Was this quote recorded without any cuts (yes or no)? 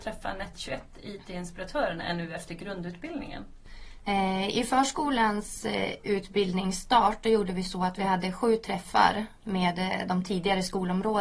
yes